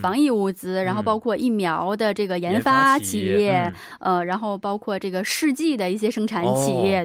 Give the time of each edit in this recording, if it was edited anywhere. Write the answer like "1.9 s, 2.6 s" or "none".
none